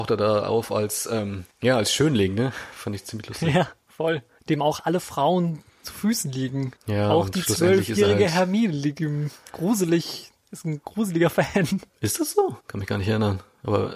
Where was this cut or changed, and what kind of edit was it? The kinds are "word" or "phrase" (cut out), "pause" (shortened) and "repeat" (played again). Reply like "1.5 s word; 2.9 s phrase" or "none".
1.5 s pause; 4.4 s pause; 5.7 s pause; 6.8 s pause; 11.9 s pause; 12.6 s pause